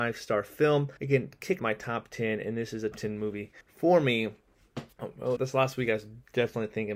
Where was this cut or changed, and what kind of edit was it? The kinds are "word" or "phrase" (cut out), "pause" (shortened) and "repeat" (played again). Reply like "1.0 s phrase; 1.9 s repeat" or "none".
1.0 s pause; 1.6 s phrase; 2.9 s word; 3.6 s pause; 4.9 s pause; 5.4 s phrase